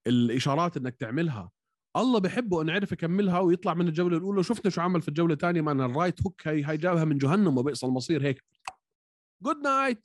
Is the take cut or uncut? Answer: uncut